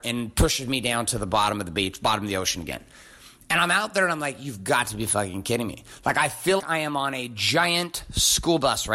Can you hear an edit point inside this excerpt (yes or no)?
yes